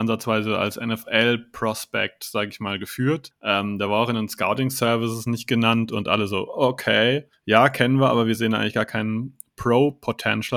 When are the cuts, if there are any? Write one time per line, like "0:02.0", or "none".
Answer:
none